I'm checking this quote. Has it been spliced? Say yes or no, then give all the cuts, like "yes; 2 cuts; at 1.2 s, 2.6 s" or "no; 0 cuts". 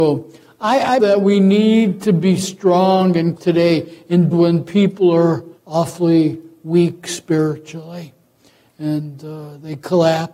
yes; 4 cuts; at 1.0 s, 3.4 s, 4.3 s, 5.6 s